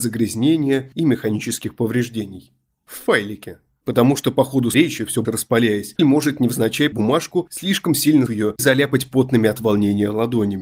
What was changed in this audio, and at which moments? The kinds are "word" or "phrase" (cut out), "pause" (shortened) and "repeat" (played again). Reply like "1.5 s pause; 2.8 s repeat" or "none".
4.7 s word; 5.2 s word; 6.0 s word; 6.9 s word; 8.3 s word; 8.6 s word